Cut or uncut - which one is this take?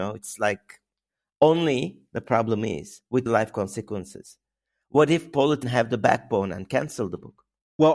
cut